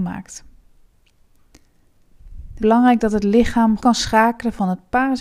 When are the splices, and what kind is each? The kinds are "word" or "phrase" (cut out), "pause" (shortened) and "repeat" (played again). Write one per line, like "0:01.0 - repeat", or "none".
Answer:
0:02.6 - word
0:03.8 - word